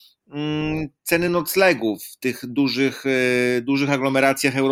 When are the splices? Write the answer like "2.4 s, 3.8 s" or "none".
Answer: none